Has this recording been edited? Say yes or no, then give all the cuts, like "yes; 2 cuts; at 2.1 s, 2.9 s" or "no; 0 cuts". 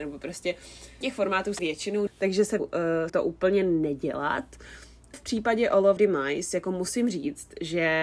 yes; 7 cuts; at 1.0 s, 1.6 s, 2.1 s, 2.6 s, 3.1 s, 5.1 s, 6.0 s